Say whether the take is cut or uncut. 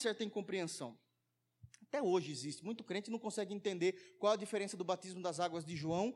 uncut